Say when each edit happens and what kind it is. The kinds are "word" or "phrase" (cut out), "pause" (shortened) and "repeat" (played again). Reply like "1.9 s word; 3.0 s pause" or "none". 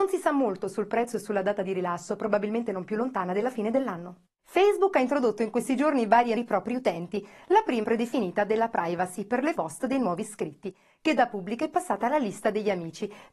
4.3 s pause; 6.4 s phrase; 7.8 s phrase; 9.5 s phrase